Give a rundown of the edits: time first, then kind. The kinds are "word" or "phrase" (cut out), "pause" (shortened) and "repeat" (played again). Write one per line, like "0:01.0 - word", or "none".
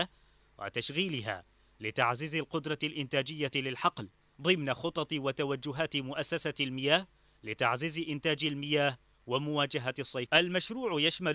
0:10.3 - word